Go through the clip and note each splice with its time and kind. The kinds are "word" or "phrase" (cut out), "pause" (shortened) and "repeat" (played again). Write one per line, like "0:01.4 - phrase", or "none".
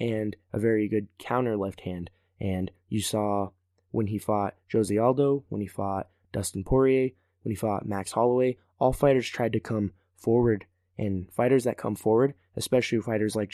none